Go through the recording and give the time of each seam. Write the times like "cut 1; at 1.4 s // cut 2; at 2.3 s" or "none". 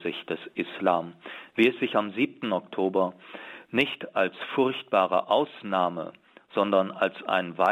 none